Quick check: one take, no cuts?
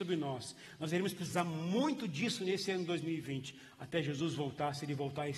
yes; 0 cuts

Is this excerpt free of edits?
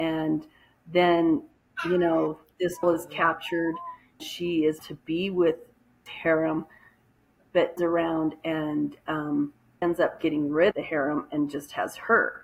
no; 7 cuts; at 2.8 s, 4.2 s, 4.8 s, 6.1 s, 7.8 s, 9.8 s, 10.7 s

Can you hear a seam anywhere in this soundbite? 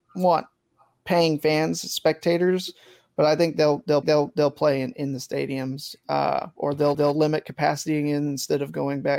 yes; 2 cuts; at 4.0 s, 6.9 s

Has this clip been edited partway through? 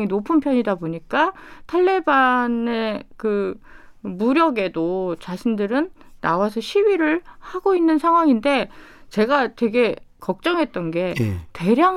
no; 0 cuts

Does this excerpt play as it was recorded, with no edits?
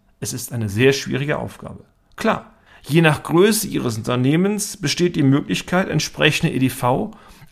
no; 1 cut; at 2.7 s

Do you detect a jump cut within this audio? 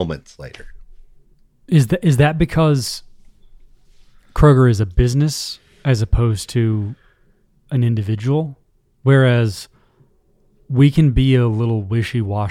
no; 0 cuts

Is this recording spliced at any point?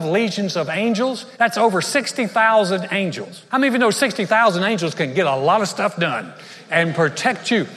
yes; 2 cuts; at 1.3 s, 3.5 s

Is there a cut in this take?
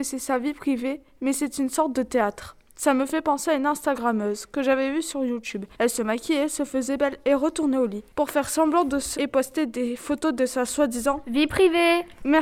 yes; 2 cuts; at 5.7 s, 9.1 s

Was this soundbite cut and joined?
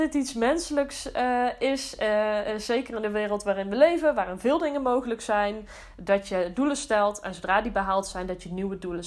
no; 0 cuts

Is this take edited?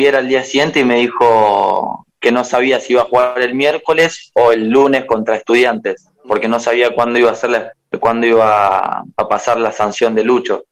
yes; 3 cuts; at 2.1 s, 6.1 s, 9.1 s

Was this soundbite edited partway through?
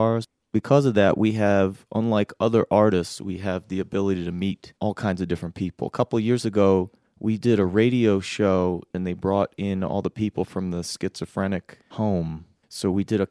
yes; 1 cut; at 4.8 s

